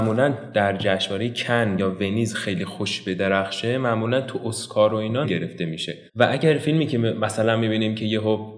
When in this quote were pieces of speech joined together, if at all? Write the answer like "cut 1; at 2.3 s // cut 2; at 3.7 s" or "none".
cut 1; at 1.8 s // cut 2; at 5.2 s // cut 3; at 6.1 s